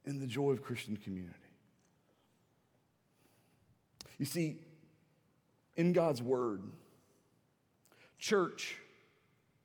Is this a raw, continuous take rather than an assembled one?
yes; 0 cuts

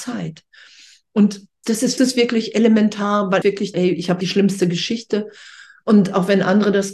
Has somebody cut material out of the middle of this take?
yes; 5 cuts; at 1.6 s, 2.0 s, 3.4 s, 3.7 s, 4.2 s

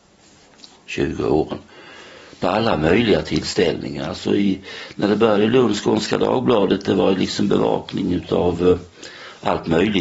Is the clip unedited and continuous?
yes; 0 cuts

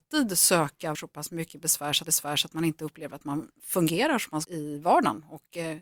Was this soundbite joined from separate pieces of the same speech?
yes; 3 cuts; at 0.9 s, 2.0 s, 4.4 s

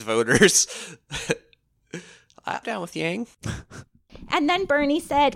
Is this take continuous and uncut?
no; 1 cut; at 2.6 s

